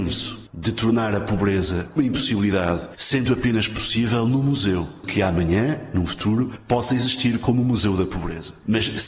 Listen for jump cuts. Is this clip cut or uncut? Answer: cut